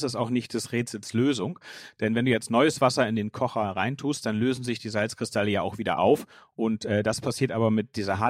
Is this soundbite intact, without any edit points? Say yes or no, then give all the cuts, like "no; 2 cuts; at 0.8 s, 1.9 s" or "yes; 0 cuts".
yes; 0 cuts